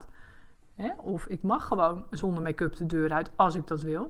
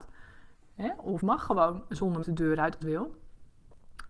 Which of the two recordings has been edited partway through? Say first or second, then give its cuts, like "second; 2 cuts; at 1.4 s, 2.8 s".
second; 3 cuts; at 1.2 s, 2.2 s, 2.8 s